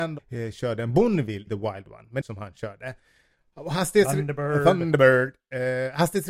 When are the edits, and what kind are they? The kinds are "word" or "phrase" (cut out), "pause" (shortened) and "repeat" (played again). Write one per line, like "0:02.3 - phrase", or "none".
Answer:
0:01.5 - word
0:02.2 - phrase